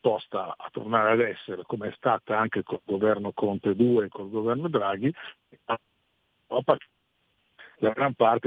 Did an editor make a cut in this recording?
no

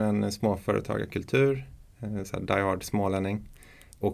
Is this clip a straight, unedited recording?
yes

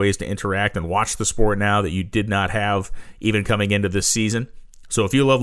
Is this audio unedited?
yes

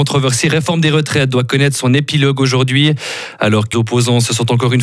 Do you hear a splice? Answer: yes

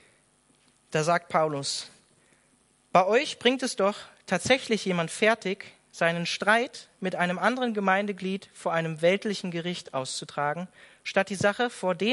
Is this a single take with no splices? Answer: yes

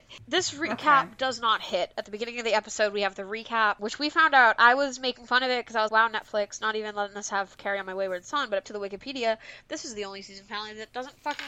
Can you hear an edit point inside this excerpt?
yes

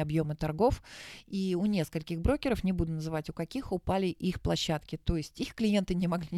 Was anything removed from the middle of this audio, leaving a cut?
no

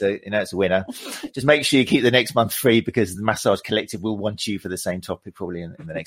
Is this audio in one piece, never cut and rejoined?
yes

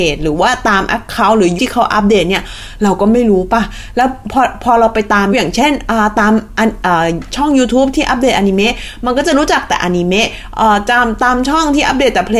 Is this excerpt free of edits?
no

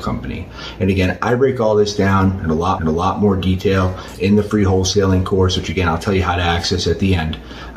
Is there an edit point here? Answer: yes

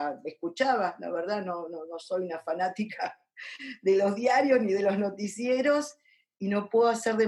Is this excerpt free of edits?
yes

